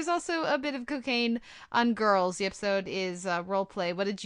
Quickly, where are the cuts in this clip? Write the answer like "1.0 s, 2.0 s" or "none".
none